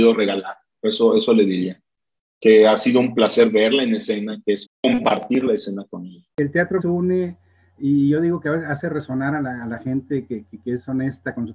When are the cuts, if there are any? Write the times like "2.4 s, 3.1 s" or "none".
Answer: 4.6 s, 6.8 s